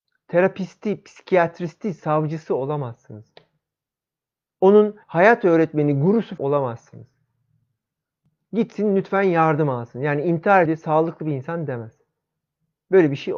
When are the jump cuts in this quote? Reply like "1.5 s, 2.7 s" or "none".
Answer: 5.0 s, 6.4 s, 10.7 s